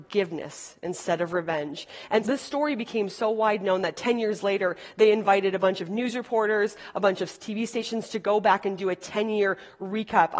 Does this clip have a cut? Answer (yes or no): yes